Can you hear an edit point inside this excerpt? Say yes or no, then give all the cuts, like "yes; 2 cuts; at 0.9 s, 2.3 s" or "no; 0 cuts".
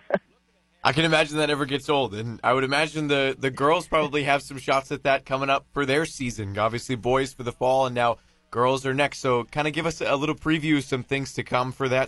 no; 0 cuts